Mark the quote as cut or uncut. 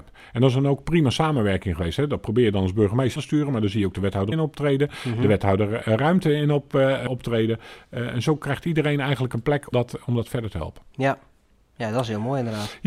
cut